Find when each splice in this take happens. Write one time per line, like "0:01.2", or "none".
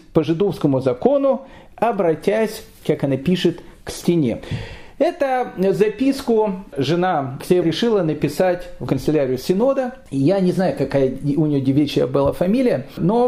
0:07.6
0:08.9